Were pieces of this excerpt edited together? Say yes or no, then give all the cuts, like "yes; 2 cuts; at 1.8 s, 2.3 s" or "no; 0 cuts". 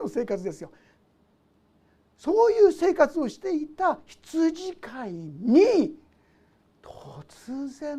no; 0 cuts